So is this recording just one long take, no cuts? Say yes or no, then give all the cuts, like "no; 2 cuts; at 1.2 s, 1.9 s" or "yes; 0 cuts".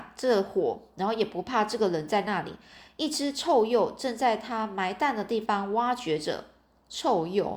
yes; 0 cuts